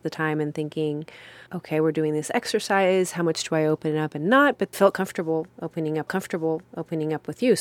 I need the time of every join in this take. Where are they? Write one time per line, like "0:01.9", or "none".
0:01.5
0:04.7
0:06.1